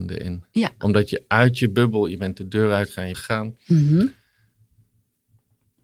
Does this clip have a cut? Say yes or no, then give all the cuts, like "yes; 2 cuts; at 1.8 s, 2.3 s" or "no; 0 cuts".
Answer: yes; 1 cut; at 3.1 s